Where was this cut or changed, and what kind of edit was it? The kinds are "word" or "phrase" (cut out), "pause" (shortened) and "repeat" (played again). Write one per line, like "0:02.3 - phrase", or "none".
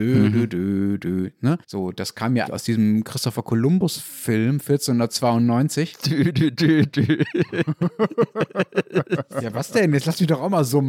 0:01.6 - pause
0:02.5 - word